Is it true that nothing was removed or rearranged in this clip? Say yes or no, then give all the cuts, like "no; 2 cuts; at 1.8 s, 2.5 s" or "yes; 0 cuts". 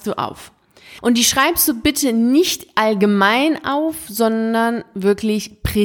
yes; 0 cuts